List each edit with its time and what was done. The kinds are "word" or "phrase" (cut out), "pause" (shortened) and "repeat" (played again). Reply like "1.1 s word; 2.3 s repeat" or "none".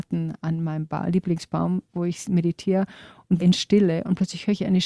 3.4 s word